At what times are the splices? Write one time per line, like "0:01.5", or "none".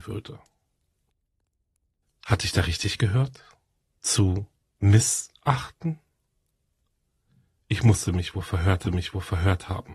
0:08.8